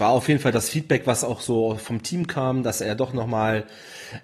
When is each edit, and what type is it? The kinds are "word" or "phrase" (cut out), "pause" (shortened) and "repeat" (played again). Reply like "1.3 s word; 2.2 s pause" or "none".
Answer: none

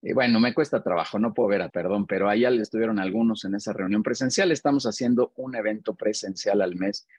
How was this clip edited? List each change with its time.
1.7 s word

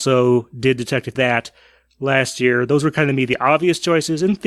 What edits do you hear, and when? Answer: 1.1 s phrase

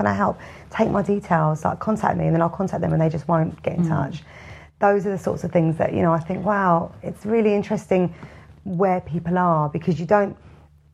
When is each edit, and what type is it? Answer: none

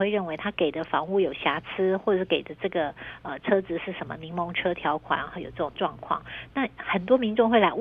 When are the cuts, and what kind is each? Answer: none

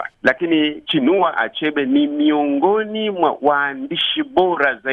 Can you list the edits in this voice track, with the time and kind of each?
none

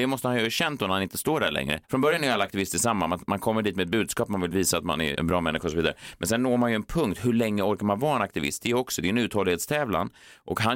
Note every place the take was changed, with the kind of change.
1.8 s pause; 5.2 s word

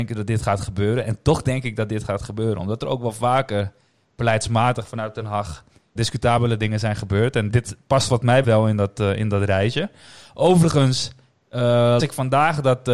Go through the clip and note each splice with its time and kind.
6.0 s word; 7.5 s word; 8.4 s word; 12.0 s word

